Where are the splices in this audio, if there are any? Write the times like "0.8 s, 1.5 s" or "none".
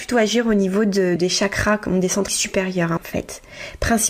1.2 s, 2.3 s, 3.0 s